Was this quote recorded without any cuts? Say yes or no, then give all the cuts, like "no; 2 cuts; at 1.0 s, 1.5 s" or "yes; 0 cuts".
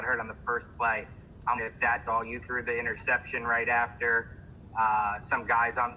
no; 2 cuts; at 1.6 s, 2.1 s